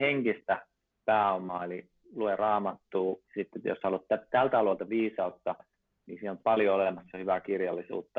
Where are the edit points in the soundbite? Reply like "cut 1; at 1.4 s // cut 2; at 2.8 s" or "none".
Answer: cut 1; at 3.2 s